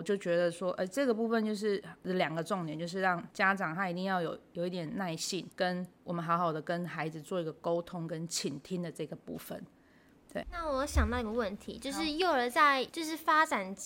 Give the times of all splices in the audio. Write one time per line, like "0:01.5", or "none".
0:03.3
0:05.5
0:10.4